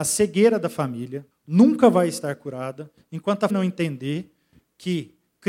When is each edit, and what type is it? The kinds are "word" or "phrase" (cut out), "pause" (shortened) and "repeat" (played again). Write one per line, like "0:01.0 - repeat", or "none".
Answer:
0:01.3 - pause
0:03.5 - word